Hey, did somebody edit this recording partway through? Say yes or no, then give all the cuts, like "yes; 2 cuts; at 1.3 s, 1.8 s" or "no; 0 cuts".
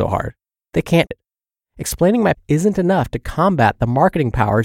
yes; 2 cuts; at 1.1 s, 2.3 s